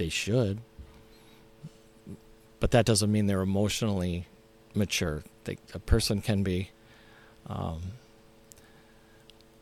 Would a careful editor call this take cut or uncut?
uncut